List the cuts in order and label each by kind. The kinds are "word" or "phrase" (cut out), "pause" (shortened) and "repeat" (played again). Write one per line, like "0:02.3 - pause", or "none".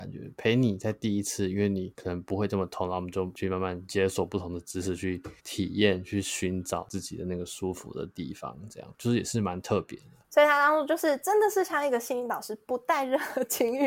0:05.4 - pause